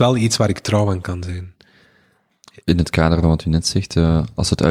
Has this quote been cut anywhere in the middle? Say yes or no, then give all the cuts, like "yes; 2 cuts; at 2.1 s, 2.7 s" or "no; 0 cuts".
no; 0 cuts